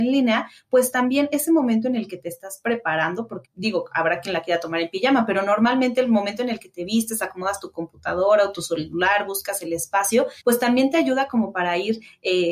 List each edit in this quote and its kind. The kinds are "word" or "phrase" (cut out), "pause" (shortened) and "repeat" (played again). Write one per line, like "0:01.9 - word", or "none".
0:03.4 - word
0:10.4 - pause